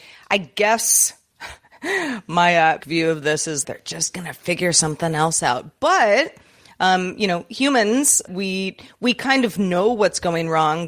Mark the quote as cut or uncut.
cut